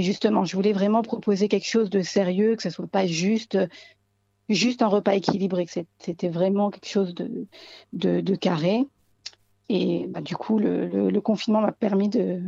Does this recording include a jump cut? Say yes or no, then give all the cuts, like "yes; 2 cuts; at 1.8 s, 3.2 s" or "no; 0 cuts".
no; 0 cuts